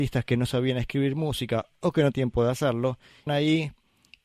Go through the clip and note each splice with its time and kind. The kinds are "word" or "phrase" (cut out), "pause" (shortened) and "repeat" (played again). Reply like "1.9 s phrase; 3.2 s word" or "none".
2.1 s word; 3.3 s word